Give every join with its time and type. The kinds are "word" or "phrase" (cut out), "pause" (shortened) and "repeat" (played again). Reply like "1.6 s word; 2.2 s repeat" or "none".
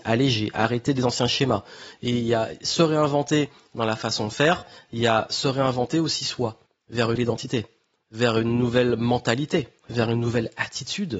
6.7 s pause; 7.2 s word; 9.8 s pause